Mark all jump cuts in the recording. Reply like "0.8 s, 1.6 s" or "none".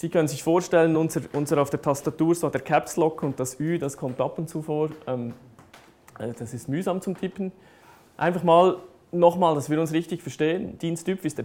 none

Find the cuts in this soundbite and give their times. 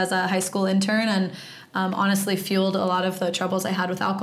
none

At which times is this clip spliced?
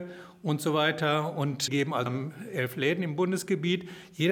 1.7 s, 2.1 s

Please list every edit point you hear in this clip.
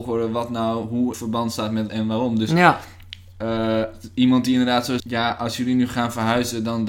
1.1 s, 1.9 s, 5.0 s

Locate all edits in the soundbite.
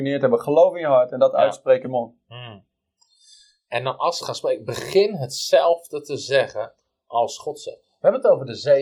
1.8 s, 4.2 s

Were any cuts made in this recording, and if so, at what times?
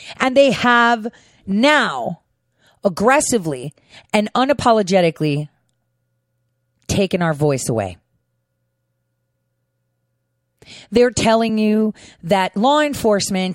none

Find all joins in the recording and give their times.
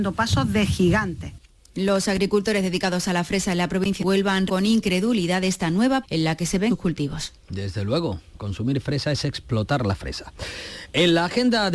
1.5 s, 4.0 s, 4.5 s, 6.0 s, 6.7 s

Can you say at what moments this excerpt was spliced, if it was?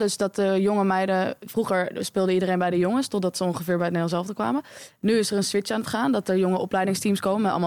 none

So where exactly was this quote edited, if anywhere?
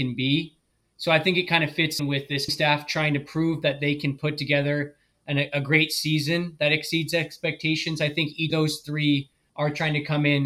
2.0 s, 2.5 s, 8.5 s

